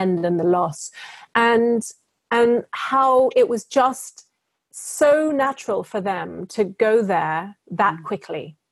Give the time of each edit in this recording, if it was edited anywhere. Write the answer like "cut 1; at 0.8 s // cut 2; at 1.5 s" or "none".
none